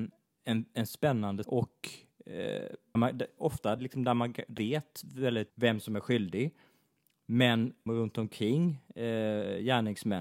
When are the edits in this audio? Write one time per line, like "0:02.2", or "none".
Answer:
0:01.4
0:02.9
0:03.8
0:04.6
0:05.5
0:07.9